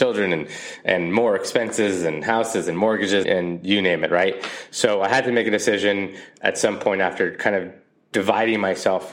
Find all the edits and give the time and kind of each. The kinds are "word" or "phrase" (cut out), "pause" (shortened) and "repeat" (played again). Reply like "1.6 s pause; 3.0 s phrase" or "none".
3.2 s word